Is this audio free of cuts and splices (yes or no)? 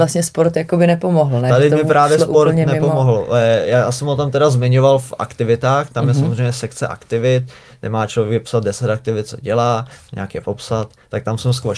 yes